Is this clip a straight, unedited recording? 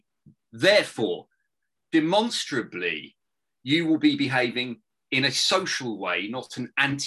yes; 0 cuts

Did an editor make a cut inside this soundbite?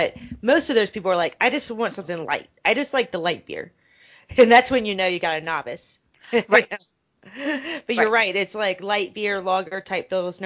no; 0 cuts

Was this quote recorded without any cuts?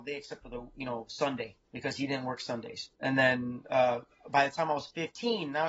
no; 2 cuts; at 1.6 s, 2.9 s

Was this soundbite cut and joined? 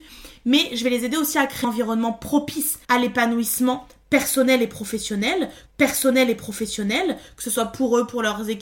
yes; 3 cuts; at 1.6 s, 2.8 s, 5.7 s

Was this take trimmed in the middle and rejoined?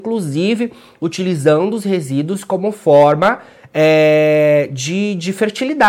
no; 0 cuts

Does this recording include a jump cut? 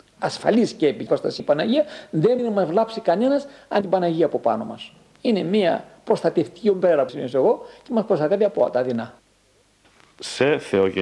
yes; 5 cuts; at 1.1 s, 1.4 s, 2.4 s, 3.8 s, 7.1 s

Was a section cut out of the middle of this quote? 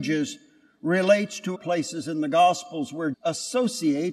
yes; 2 cuts; at 1.5 s, 3.1 s

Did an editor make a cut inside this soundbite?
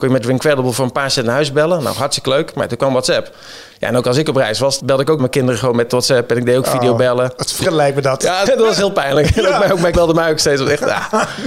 yes; 6 cuts; at 4.8 s, 5.2 s, 5.9 s, 7.6 s, 8.5 s, 9.9 s

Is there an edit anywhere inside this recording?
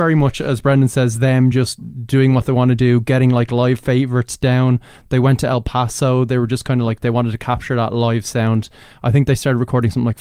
no; 0 cuts

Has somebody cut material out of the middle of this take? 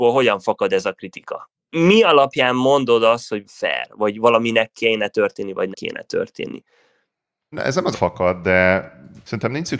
yes; 3 cuts; at 3.4 s, 5.7 s, 7.9 s

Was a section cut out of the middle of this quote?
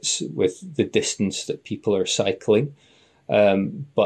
no; 0 cuts

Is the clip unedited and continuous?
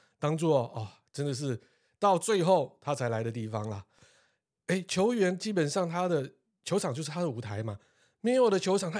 yes; 0 cuts

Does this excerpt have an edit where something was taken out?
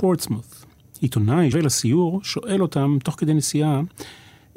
yes; 1 cut; at 1.5 s

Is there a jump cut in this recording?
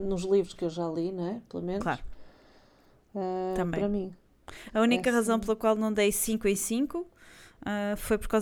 no; 0 cuts

